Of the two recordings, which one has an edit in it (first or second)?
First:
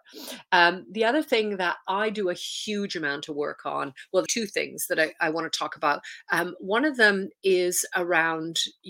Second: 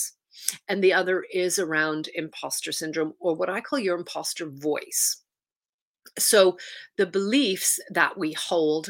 first